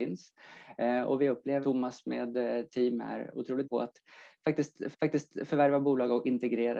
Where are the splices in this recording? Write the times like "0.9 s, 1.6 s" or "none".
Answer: 1.6 s, 3.6 s, 4.9 s